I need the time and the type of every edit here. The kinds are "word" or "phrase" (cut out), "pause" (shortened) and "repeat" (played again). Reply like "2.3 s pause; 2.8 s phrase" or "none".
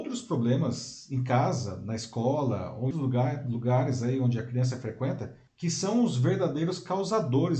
2.9 s word; 5.5 s pause